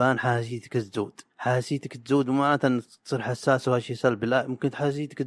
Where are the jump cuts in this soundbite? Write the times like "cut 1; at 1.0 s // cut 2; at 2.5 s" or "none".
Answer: cut 1; at 1.3 s